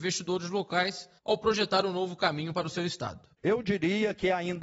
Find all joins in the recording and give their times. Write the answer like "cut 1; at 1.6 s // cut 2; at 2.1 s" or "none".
cut 1; at 3.3 s